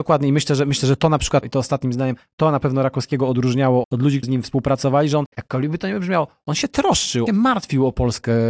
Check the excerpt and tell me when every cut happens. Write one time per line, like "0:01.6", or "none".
0:01.4
0:03.8
0:04.2
0:05.3
0:07.3